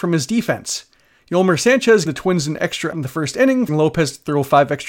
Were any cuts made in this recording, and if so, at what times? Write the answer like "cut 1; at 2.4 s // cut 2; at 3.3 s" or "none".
cut 1; at 2.1 s // cut 2; at 2.9 s // cut 3; at 3.7 s